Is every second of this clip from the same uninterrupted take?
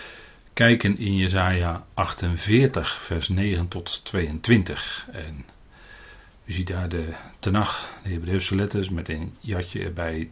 yes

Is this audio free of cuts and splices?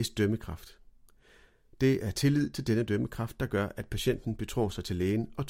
yes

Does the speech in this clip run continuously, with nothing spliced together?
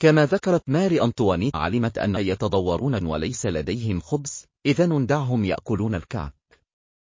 no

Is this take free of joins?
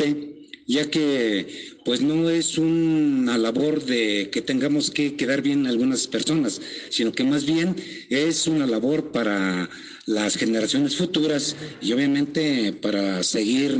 yes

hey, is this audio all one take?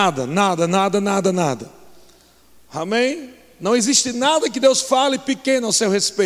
yes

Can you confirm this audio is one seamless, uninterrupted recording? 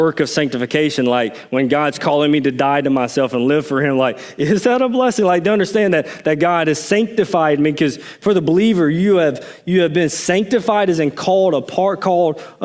yes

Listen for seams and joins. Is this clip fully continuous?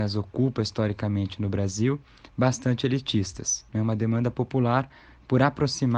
no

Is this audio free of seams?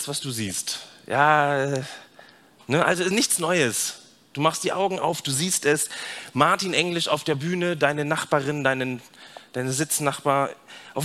yes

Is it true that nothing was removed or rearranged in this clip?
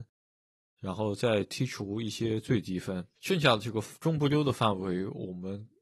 no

